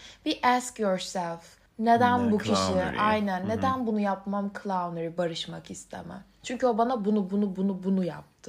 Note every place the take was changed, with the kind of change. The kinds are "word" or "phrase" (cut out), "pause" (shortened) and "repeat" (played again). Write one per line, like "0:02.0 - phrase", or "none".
0:01.7 - pause